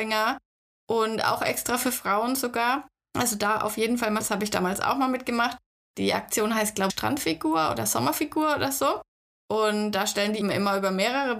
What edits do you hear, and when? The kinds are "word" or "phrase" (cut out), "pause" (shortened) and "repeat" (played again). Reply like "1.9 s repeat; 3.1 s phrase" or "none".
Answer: 4.2 s word; 6.9 s word; 10.4 s word

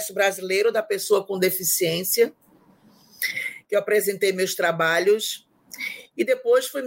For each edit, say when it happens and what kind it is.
none

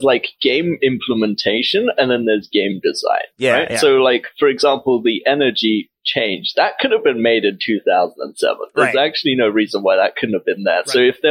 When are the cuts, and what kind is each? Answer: none

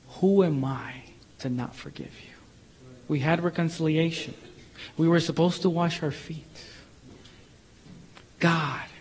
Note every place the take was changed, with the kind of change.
1.2 s pause; 3.0 s pause

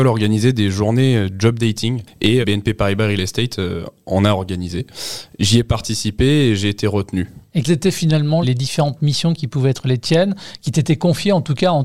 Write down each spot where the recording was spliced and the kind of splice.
2.4 s word; 7.6 s word; 8.4 s word

